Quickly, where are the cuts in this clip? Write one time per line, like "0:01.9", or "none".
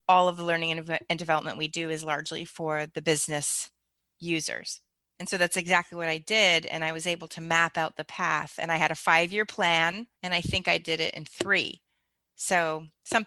0:05.0
0:10.1